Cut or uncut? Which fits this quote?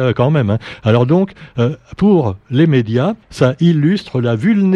cut